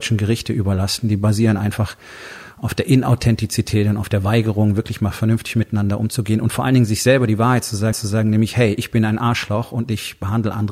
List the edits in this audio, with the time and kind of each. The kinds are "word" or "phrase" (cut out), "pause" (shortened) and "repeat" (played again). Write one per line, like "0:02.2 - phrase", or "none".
0:07.9 - repeat

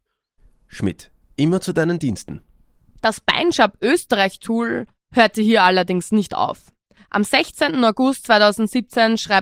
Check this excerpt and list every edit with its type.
0:01.2 - pause

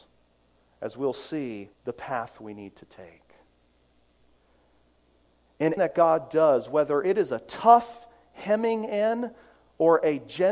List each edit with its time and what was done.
0:01.7 - pause
0:05.8 - word

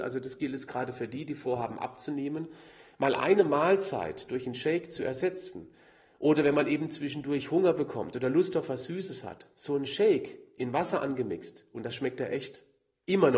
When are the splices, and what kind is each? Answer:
none

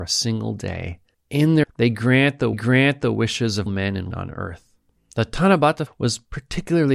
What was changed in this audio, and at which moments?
0:01.1 - pause
0:01.6 - phrase
0:02.5 - repeat
0:03.7 - word
0:04.1 - word
0:05.0 - pause
0:05.9 - word

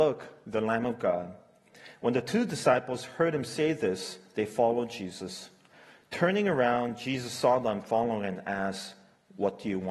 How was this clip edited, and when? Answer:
none

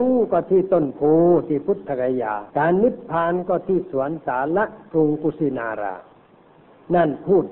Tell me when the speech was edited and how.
0:02.5 - pause

